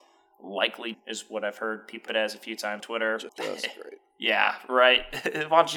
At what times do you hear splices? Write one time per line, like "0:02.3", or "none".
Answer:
0:00.9
0:02.1
0:02.8
0:03.3